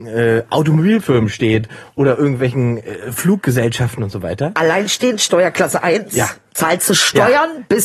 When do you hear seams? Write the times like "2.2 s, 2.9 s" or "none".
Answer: none